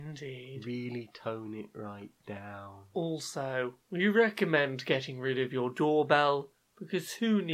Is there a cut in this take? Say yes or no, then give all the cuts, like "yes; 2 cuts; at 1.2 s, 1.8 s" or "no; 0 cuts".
no; 0 cuts